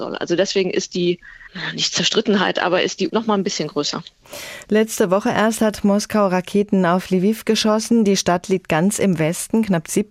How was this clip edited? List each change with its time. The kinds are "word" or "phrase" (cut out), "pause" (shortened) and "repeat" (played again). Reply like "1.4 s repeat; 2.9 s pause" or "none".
3.1 s word